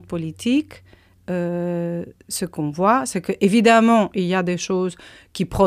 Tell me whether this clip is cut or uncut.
uncut